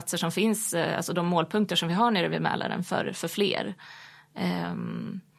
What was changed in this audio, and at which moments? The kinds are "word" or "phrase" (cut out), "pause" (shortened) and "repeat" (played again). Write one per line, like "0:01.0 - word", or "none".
none